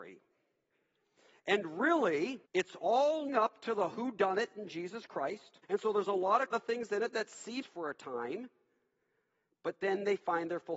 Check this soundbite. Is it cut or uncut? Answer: cut